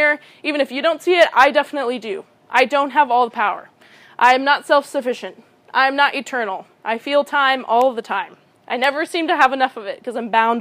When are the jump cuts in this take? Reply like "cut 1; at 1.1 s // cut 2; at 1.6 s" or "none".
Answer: none